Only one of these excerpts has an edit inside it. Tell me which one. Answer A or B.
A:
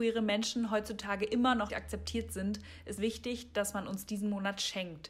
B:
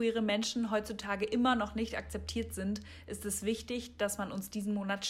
A